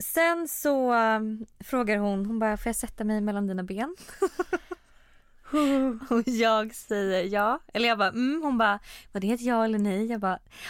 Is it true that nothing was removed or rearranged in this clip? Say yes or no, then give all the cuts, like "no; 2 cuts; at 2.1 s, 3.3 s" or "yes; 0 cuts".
yes; 0 cuts